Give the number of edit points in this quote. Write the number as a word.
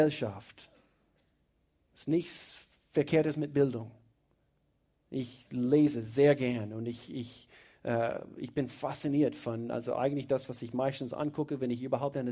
zero